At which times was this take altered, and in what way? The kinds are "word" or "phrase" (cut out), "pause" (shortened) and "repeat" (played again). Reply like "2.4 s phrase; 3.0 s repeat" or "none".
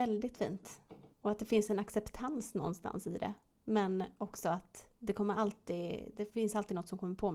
1.1 s pause; 3.5 s pause; 5.0 s pause